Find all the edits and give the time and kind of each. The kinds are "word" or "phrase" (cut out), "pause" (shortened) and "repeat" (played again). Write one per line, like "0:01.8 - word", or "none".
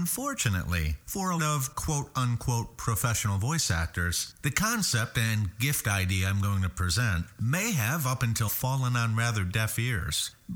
0:01.4 - word
0:08.5 - word